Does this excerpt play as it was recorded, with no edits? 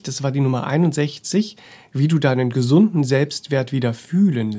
yes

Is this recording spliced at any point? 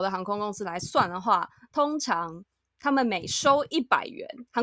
no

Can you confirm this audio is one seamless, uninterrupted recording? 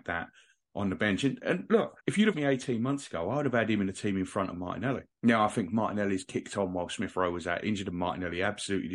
no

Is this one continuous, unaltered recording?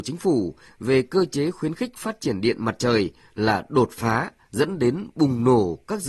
yes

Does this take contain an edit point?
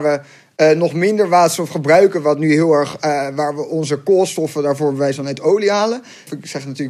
no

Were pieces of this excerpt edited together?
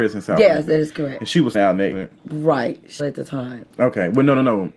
yes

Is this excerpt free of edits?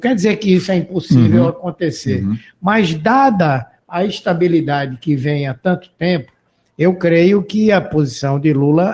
yes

